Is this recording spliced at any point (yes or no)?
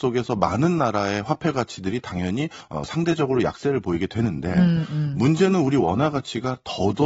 no